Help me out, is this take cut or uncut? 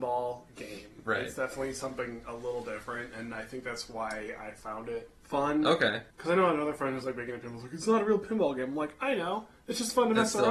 cut